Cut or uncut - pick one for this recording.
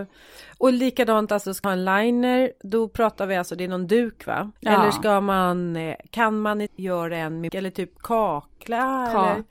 cut